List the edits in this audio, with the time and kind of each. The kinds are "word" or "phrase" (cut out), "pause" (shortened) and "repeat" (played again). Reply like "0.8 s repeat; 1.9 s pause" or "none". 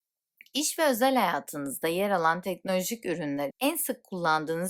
3.5 s word

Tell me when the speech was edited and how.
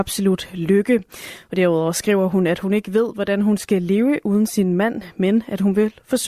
none

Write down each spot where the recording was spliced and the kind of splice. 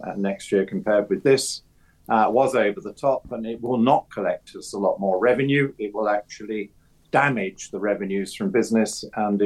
none

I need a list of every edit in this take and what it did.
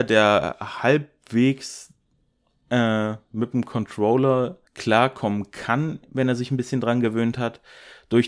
4.7 s pause

